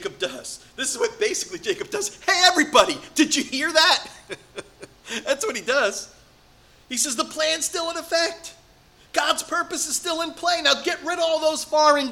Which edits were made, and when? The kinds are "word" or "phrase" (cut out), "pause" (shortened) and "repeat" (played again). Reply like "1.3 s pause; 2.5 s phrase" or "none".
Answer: none